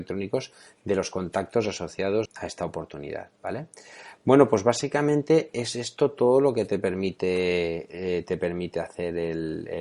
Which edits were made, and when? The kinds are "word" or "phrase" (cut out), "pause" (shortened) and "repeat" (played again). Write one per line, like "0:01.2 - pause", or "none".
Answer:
0:02.2 - word